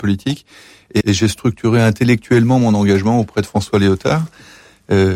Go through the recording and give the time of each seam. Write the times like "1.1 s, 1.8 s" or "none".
1.0 s

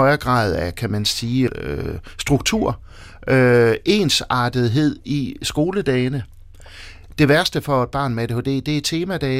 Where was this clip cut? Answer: 1.5 s

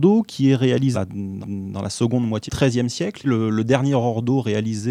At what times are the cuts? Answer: 0.9 s, 1.4 s, 2.5 s, 3.2 s

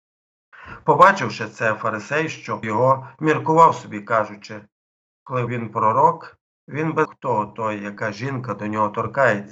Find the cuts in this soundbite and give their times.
2.6 s, 5.5 s, 7.1 s

